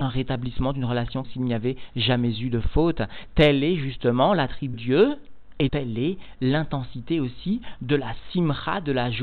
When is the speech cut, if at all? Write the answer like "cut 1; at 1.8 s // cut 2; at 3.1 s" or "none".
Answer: cut 1; at 1.2 s // cut 2; at 4.7 s // cut 3; at 5.7 s